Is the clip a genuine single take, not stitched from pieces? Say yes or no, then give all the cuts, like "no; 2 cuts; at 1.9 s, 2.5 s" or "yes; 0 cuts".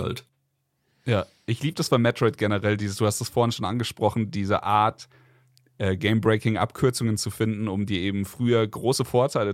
yes; 0 cuts